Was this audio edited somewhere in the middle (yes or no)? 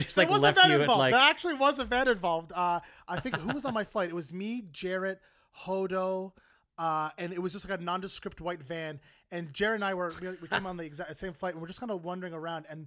no